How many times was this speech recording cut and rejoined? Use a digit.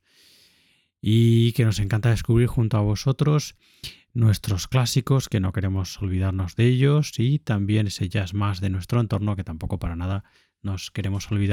0